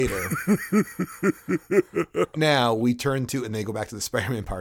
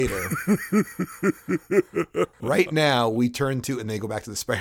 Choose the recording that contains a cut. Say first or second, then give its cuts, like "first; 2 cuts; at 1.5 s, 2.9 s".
first; 1 cut; at 2.3 s